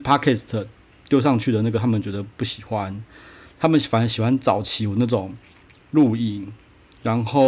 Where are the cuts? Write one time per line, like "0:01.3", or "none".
none